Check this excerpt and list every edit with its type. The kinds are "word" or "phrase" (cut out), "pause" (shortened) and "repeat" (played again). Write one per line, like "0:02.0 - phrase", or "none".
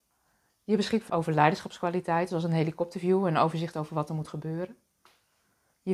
0:01.1 - word